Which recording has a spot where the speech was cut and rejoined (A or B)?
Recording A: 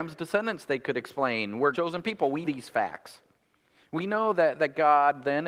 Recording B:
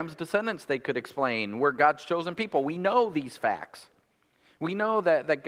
A